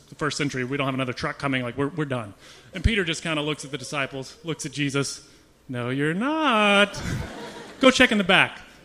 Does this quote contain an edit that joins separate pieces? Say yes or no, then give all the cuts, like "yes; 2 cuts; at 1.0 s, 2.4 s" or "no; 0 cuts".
no; 0 cuts